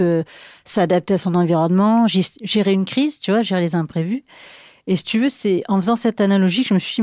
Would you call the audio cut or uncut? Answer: uncut